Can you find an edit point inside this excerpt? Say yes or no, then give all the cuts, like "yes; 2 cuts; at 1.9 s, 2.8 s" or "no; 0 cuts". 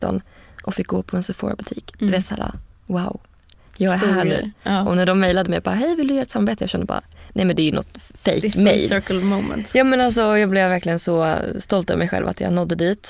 no; 0 cuts